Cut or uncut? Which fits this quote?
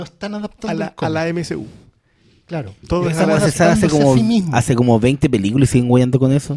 uncut